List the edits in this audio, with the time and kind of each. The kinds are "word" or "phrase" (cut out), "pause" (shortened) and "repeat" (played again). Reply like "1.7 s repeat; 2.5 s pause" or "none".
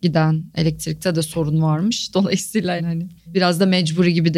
2.8 s word; 3.2 s pause